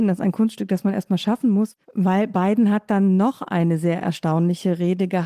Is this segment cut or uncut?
cut